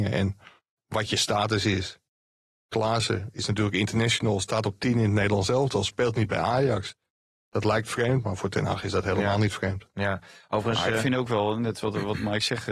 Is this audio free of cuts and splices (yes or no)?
yes